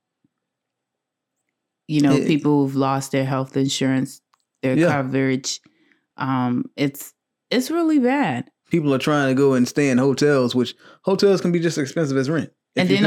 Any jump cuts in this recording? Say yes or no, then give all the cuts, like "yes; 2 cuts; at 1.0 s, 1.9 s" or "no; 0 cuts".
no; 0 cuts